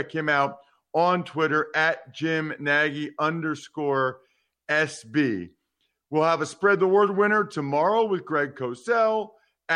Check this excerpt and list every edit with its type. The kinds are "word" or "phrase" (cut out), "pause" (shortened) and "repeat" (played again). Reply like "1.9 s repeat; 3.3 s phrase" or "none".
none